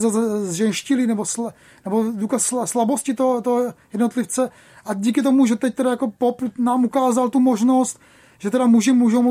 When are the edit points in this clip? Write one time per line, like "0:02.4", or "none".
none